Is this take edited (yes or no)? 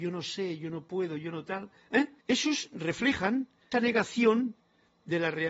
yes